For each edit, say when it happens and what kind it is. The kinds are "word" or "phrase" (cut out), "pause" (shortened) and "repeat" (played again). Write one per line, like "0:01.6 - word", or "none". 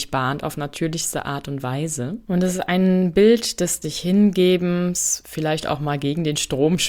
0:02.2 - pause
0:03.8 - word